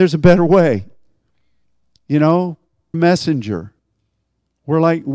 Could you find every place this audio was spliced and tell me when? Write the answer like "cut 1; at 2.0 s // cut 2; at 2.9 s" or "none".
cut 1; at 2.9 s